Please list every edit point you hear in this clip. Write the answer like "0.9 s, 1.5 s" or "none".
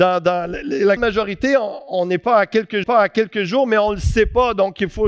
1.0 s, 2.8 s